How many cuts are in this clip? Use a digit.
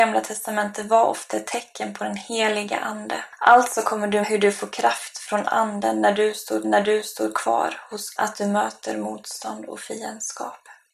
3